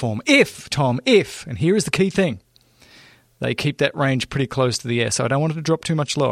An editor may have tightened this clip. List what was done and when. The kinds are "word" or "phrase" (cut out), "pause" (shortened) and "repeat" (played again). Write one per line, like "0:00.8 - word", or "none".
none